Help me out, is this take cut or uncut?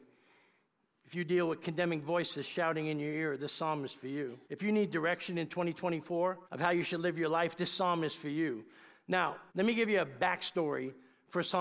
cut